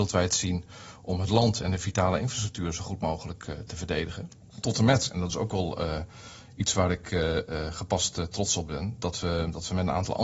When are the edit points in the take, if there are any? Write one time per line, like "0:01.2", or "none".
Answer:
none